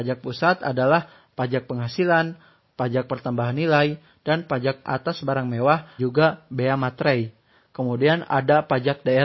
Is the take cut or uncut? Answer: cut